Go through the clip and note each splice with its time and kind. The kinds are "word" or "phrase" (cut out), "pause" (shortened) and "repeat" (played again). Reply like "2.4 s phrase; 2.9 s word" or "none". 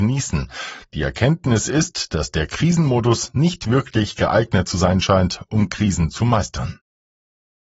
none